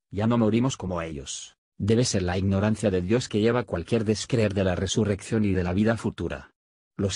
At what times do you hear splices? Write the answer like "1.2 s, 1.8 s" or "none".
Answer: 1.6 s